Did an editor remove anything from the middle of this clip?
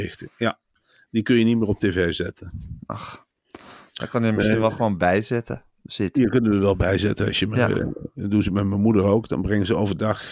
no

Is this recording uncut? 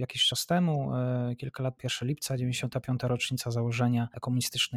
no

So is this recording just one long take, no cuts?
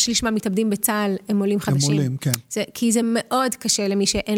yes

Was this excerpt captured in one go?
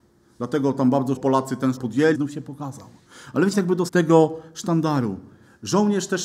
no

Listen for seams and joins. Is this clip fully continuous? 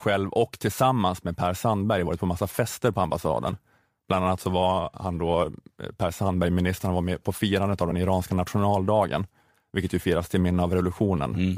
yes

